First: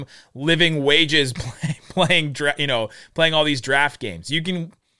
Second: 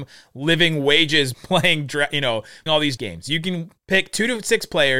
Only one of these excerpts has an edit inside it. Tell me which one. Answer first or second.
second